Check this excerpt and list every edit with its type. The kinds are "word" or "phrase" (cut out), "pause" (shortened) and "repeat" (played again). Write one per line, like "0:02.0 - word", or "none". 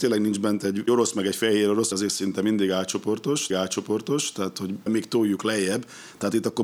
0:01.9 - word
0:03.5 - repeat
0:04.9 - word